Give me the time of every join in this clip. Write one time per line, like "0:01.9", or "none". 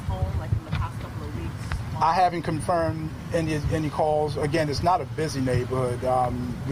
none